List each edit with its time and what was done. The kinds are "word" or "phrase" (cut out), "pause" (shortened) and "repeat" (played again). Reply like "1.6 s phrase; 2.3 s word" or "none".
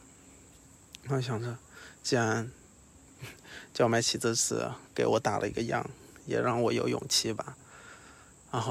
4.9 s pause